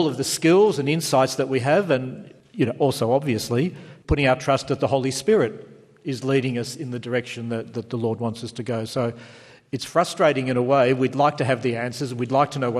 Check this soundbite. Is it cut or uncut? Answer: uncut